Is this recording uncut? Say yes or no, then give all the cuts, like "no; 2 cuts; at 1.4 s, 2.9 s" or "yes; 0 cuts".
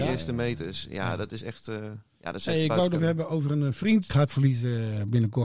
no; 2 cuts; at 3.0 s, 4.1 s